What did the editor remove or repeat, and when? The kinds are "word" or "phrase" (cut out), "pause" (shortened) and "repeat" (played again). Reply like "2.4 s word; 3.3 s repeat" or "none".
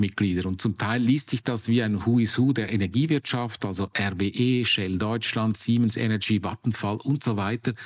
none